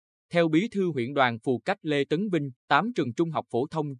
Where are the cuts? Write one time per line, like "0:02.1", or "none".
0:02.6